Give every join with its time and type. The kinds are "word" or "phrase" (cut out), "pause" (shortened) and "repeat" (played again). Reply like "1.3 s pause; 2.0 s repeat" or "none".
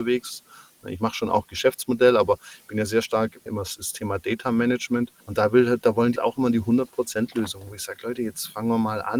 3.5 s word; 5.2 s pause; 6.2 s word